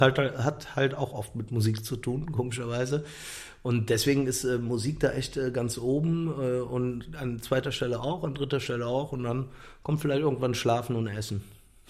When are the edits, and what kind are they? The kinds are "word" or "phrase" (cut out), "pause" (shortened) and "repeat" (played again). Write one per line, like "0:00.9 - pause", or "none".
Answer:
none

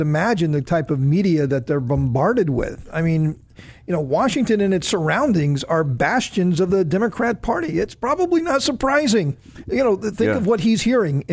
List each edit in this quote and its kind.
none

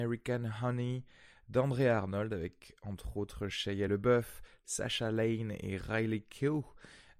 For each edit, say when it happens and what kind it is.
none

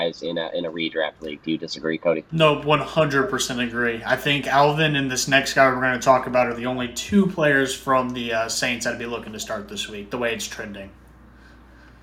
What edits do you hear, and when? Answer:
none

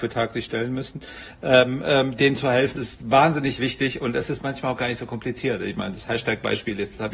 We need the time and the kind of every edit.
0:02.8 - word

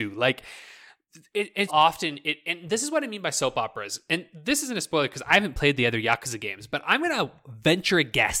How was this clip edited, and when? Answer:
0:01.7 - word

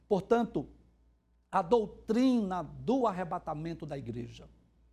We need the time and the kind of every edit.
none

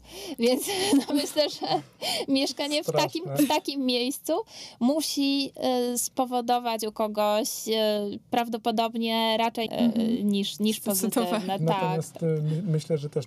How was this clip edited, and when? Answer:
0:09.7 - phrase

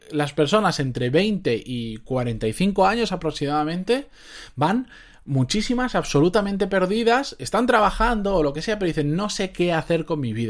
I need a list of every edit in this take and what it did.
none

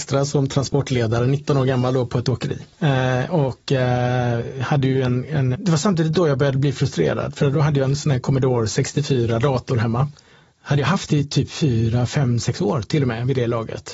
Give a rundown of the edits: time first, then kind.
0:02.7 - pause
0:05.5 - phrase
0:10.3 - pause

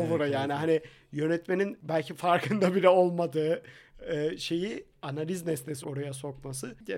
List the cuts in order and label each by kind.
0:05.8 - word

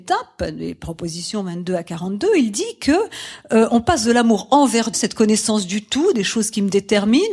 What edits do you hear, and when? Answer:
0:04.9 - word

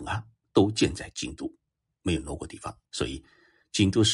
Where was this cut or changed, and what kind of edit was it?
0:02.8 - pause

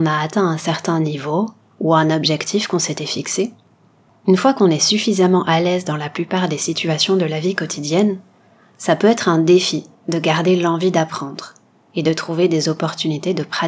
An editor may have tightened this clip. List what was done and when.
0:01.7 - pause

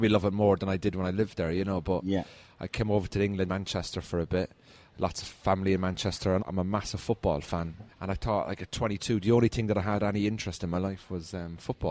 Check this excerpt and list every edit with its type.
0:03.5 - phrase
0:06.4 - word
0:07.9 - pause

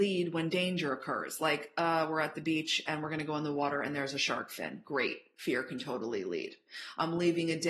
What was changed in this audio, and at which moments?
none

